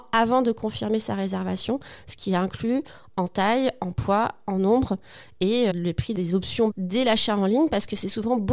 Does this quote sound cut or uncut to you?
cut